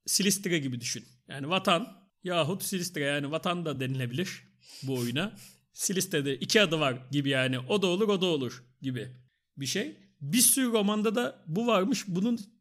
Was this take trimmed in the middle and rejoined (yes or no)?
no